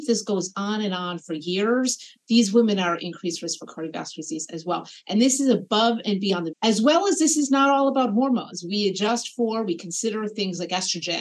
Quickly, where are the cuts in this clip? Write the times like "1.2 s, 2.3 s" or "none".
6.5 s